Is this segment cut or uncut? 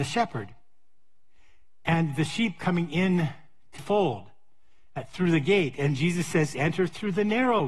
cut